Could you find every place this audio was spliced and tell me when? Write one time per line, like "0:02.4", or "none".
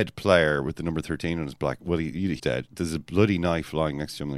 0:02.4